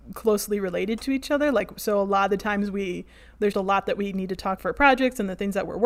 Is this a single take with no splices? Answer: no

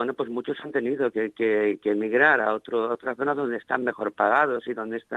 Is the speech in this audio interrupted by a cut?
no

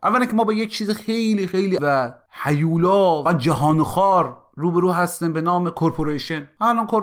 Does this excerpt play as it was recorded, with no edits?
no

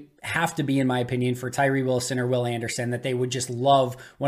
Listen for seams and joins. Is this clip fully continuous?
yes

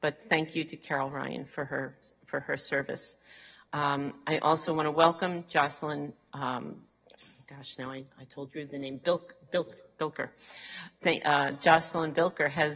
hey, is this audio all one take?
no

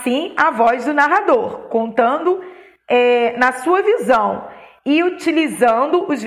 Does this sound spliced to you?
no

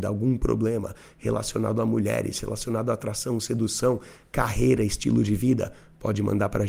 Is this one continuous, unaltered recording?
yes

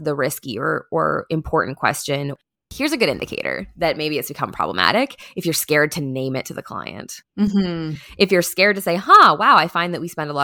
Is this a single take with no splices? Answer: yes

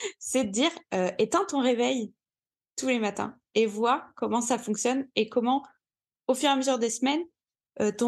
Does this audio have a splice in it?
no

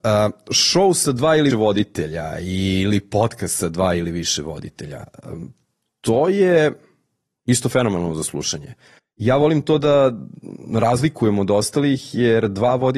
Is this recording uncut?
no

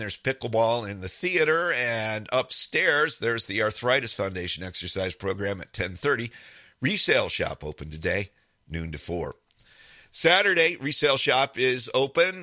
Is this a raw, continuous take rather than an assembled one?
yes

